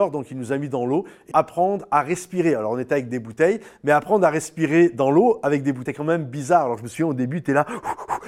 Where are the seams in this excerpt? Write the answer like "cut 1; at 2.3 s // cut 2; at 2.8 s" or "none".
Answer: cut 1; at 1.3 s // cut 2; at 5.9 s